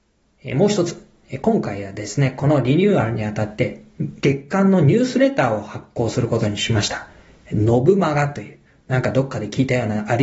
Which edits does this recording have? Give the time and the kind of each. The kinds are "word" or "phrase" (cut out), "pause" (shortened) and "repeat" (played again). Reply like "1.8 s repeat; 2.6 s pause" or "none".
4.2 s pause

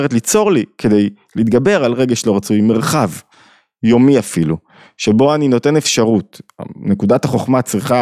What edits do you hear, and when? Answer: none

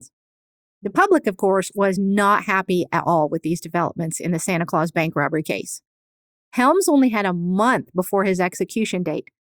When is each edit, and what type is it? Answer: none

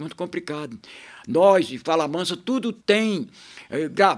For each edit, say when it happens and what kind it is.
2.8 s pause

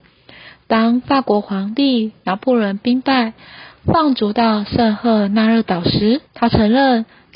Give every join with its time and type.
6.3 s pause

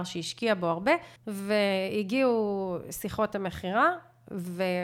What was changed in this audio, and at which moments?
1.2 s pause

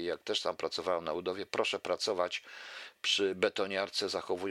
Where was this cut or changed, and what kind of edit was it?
none

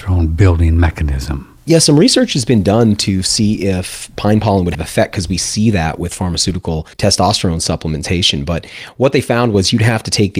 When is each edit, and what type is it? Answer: 4.7 s phrase; 6.9 s pause

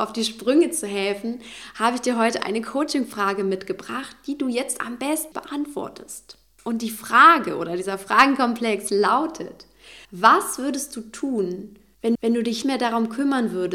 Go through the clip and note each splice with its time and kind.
5.3 s phrase; 10.0 s pause; 12.1 s repeat; 12.6 s word

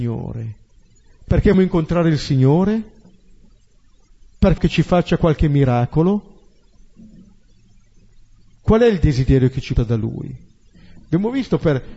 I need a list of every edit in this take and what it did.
1.5 s word; 4.6 s word; 9.8 s word

